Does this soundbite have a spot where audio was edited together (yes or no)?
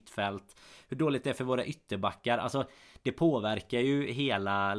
no